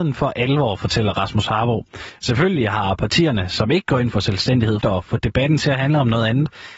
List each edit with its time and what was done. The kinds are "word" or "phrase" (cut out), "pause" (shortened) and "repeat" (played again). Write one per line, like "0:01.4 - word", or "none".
0:04.8 - word